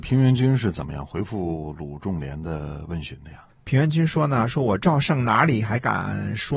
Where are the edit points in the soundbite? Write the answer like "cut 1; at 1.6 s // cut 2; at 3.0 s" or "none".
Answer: cut 1; at 3.5 s